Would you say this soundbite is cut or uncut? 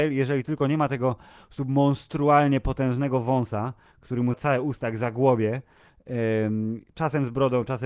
cut